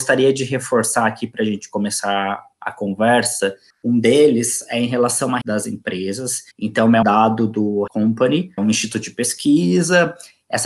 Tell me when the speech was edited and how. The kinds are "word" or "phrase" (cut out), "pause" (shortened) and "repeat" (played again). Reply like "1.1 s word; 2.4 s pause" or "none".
3.7 s pause; 5.4 s word; 6.5 s pause; 7.0 s word; 7.9 s word; 8.6 s word